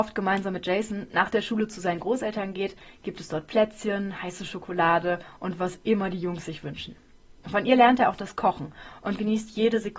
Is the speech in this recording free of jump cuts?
yes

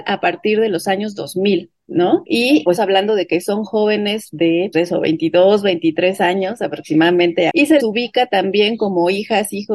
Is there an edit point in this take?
yes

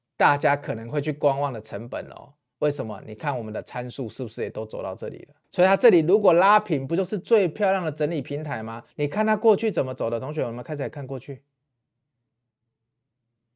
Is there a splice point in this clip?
yes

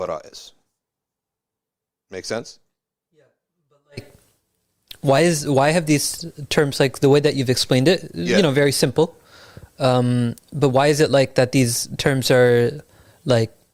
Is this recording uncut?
yes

